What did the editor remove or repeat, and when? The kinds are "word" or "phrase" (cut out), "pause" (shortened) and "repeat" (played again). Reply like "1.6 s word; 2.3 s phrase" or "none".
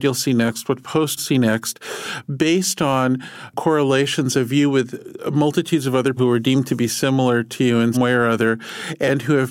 1.2 s word; 6.2 s word; 7.9 s word